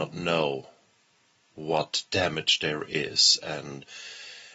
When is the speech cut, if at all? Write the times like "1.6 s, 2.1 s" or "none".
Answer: 2.1 s